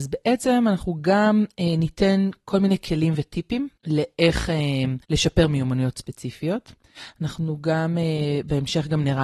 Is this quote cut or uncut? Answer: cut